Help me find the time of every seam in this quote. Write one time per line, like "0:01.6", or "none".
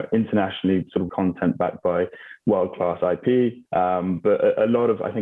0:01.1
0:03.7